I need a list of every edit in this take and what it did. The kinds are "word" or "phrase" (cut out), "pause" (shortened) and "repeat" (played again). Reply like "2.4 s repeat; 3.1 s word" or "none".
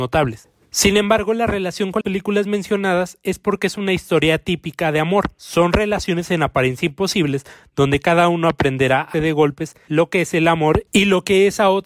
2.0 s word; 9.1 s word